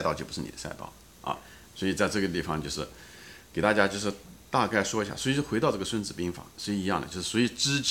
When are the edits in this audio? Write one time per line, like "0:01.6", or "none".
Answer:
0:01.6